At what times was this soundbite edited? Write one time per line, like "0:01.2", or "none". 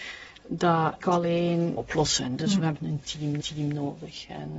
0:01.0
0:01.8
0:02.8
0:03.4